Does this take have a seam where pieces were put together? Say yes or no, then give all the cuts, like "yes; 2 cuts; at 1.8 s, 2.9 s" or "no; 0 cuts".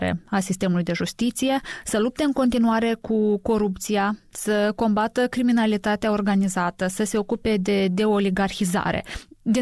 no; 0 cuts